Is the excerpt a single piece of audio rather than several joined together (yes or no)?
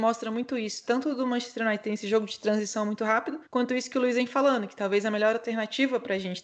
no